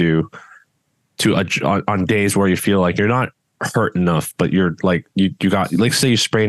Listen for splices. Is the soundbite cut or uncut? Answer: uncut